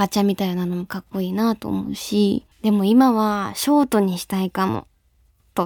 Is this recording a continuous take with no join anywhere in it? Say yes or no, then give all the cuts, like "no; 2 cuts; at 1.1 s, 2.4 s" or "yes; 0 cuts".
no; 1 cut; at 2.5 s